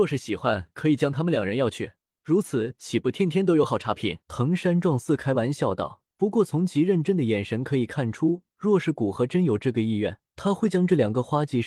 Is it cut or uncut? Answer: cut